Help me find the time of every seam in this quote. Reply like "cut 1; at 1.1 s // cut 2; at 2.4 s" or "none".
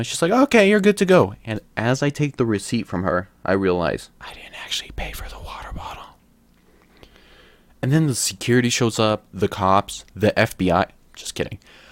cut 1; at 4.1 s